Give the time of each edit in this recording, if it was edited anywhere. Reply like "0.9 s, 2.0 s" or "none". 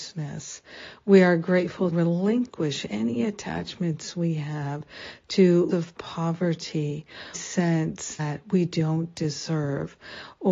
1.9 s, 5.7 s, 7.3 s, 8.2 s